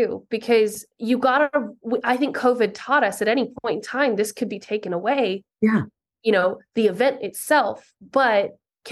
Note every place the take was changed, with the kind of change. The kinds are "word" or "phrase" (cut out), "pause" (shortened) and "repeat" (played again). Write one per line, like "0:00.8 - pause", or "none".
0:00.9 - pause
0:06.1 - pause
0:08.0 - pause